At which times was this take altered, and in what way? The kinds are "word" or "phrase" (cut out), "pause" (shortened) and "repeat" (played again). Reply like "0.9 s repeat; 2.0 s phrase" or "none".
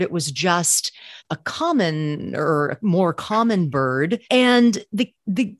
1.2 s pause; 4.2 s pause

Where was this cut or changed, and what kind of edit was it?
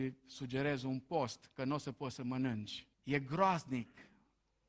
2.9 s pause

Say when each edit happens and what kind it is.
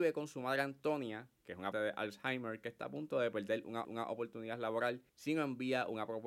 1.7 s word; 3.8 s repeat; 5.1 s pause

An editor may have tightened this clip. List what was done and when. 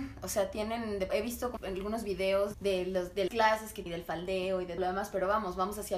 1.1 s word; 1.6 s word; 2.5 s word; 3.3 s word; 3.9 s word; 4.8 s word

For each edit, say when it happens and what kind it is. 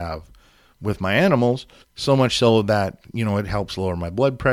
1.8 s pause

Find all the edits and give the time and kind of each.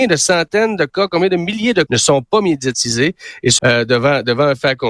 1.9 s word; 3.6 s word

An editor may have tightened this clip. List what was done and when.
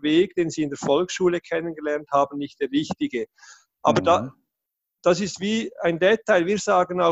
none

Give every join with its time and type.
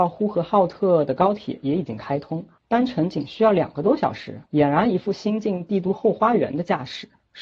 4.5 s pause

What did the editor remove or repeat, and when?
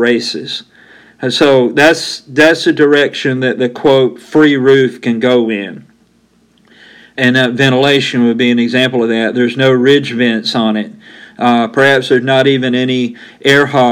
none

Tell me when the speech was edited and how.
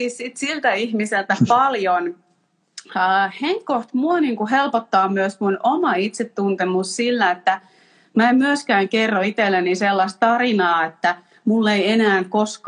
none

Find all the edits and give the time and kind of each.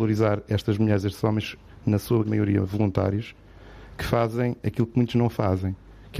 2.2 s word

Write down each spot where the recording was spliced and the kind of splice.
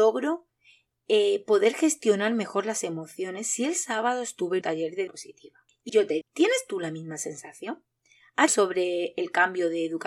4.6 s word; 5.1 s word; 5.9 s word; 6.2 s word; 8.5 s word

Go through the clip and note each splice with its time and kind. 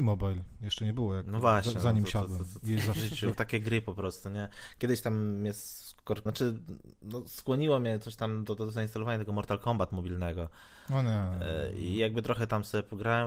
3.3 s word; 6.3 s word

